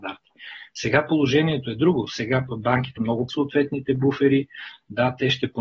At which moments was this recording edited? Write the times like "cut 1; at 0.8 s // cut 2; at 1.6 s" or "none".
cut 1; at 3.0 s // cut 2; at 3.3 s